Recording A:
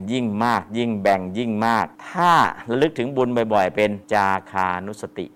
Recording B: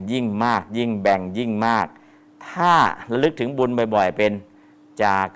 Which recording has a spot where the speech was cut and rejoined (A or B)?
A